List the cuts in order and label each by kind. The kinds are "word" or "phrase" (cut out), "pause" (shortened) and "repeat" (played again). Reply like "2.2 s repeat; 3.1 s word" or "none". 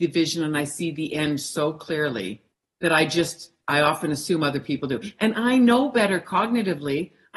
none